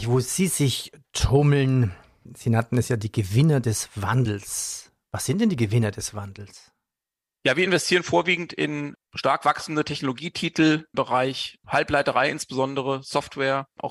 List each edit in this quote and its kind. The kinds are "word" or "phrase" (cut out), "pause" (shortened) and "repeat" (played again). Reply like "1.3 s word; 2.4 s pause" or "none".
none